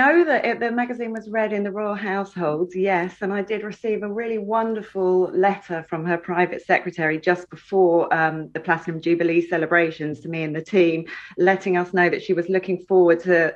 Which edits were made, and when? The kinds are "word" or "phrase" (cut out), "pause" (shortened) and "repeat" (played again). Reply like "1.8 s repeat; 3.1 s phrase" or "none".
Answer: none